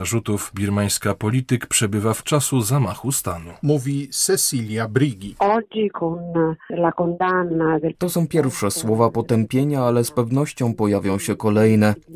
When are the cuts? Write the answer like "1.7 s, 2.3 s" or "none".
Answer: 2.2 s